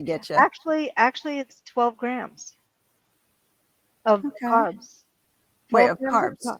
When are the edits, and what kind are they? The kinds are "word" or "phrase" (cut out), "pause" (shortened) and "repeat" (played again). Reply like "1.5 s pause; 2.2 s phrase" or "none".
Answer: none

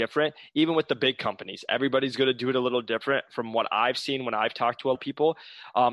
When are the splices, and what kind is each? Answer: 5.0 s word

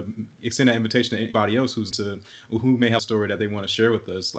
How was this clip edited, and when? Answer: 1.3 s word; 1.9 s word; 3.0 s phrase

